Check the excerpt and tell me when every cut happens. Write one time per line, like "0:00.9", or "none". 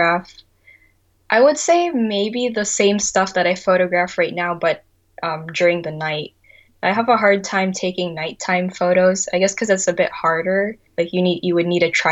0:10.9